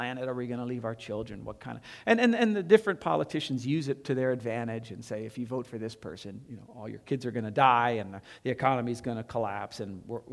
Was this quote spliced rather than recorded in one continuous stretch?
no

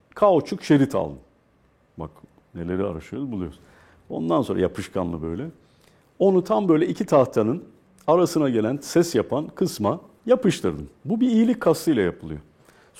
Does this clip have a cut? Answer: no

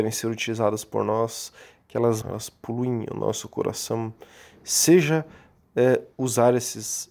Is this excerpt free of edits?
no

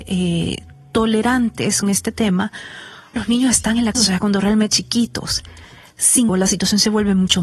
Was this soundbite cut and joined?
yes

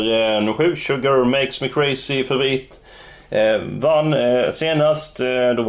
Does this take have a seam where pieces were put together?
no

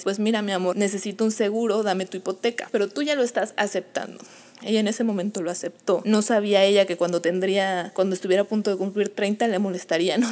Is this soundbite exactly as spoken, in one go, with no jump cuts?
yes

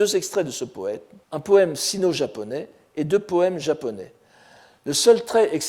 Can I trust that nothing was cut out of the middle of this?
no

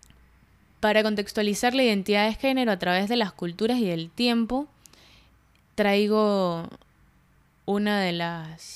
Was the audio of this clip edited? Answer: no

